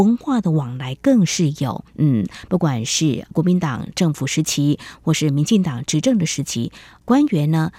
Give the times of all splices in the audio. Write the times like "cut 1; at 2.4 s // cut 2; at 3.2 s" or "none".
cut 1; at 1.9 s